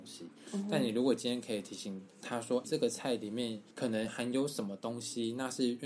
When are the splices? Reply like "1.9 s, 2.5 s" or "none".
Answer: 2.1 s, 2.6 s, 3.7 s